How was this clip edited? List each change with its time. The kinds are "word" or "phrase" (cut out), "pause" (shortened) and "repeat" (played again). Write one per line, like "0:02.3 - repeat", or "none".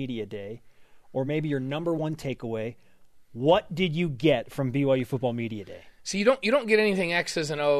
none